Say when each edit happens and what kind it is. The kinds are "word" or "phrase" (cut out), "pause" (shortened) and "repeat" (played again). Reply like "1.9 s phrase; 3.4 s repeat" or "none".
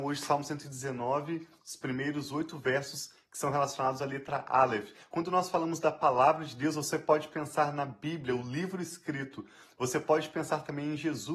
none